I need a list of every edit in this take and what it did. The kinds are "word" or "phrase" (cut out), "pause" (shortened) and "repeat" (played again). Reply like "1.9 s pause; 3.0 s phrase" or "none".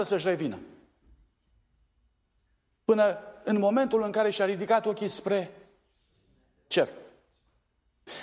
none